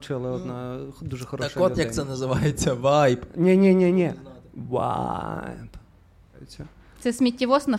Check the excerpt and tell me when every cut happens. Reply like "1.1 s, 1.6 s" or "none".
none